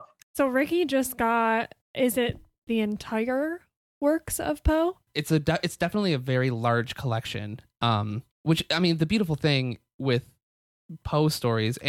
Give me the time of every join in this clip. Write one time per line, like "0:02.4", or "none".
0:01.8
0:02.7
0:05.1
0:08.3